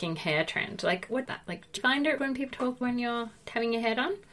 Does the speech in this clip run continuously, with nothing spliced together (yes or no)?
no